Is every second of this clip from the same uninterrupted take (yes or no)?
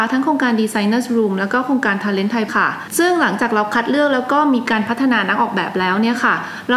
no